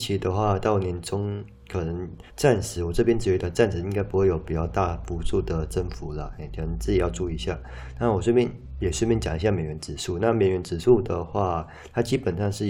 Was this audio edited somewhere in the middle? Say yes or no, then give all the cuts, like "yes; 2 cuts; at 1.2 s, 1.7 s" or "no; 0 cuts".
yes; 1 cut; at 2.3 s